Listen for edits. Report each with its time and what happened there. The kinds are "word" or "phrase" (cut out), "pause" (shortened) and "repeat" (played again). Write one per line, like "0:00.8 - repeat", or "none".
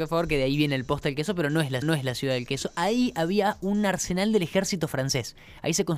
0:01.8 - repeat